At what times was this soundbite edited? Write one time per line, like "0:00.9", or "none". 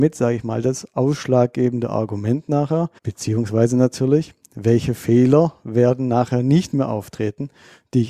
0:03.0